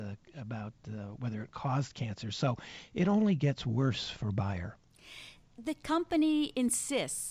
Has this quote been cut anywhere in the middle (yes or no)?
no